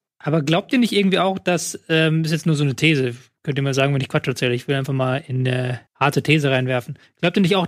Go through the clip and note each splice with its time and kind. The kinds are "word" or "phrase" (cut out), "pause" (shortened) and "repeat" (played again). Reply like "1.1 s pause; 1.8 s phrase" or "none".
5.9 s pause